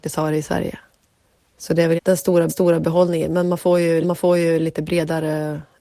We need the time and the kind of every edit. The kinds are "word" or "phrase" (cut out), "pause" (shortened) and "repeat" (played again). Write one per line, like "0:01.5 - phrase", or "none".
0:02.0 - phrase
0:02.5 - repeat
0:04.0 - repeat